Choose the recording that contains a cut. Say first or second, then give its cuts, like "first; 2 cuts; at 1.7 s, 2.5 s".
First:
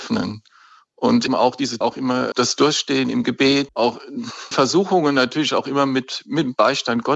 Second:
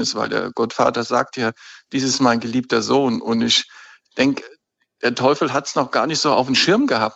first; 5 cuts; at 1.3 s, 1.8 s, 2.3 s, 3.7 s, 4.5 s